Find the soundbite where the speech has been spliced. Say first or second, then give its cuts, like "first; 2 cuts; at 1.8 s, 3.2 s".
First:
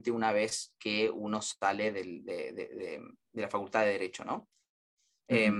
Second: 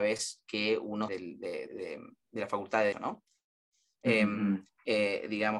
second; 3 cuts; at 1.1 s, 1.7 s, 2.9 s